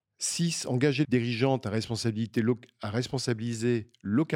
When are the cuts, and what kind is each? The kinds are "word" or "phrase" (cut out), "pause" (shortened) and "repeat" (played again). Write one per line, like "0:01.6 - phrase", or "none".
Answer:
0:01.0 - word